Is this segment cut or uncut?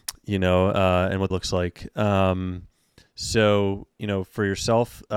cut